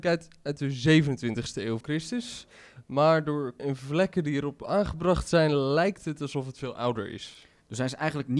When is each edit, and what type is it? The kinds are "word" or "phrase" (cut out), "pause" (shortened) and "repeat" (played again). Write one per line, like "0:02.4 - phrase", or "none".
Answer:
0:01.8 - word
0:03.6 - word

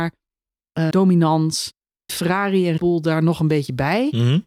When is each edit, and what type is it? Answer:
0:00.9 - word
0:02.1 - word
0:02.8 - word

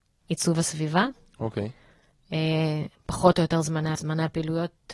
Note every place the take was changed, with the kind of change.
0:04.0 - word

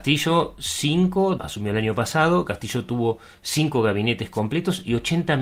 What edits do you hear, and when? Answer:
0:01.4 - word

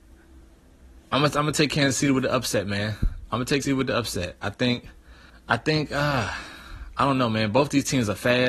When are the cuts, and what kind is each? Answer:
0:03.6 - word
0:05.3 - pause

